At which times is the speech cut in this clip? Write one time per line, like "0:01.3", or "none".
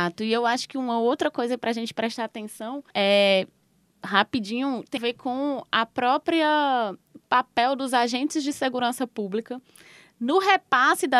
0:02.9
0:05.0

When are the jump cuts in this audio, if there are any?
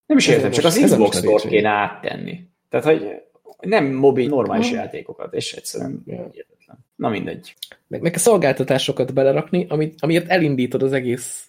0:04.2
0:06.9
0:08.0

